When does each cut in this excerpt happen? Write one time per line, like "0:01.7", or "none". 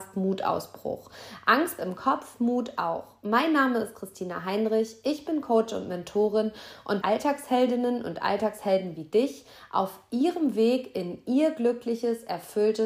0:01.8
0:07.0